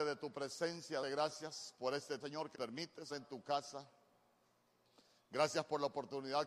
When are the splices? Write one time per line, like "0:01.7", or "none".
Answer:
0:01.0
0:02.2
0:02.5
0:03.1

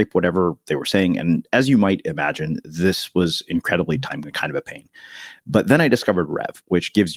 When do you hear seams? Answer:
0:04.2

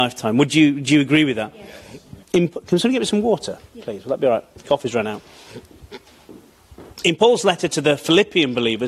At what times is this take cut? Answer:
0:02.2
0:06.9

